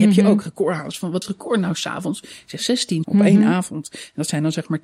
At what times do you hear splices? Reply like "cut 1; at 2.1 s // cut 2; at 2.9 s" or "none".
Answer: cut 1; at 1.2 s // cut 2; at 3.0 s